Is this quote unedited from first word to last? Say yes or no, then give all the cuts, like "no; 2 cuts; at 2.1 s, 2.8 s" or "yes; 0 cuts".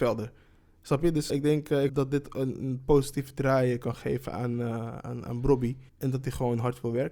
no; 3 cuts; at 1.3 s, 1.9 s, 5.9 s